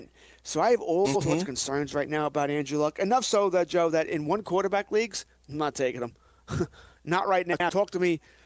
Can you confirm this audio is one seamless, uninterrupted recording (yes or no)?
yes